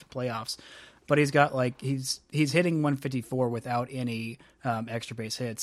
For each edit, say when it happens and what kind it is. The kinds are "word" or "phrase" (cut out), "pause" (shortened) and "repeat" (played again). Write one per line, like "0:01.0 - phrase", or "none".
none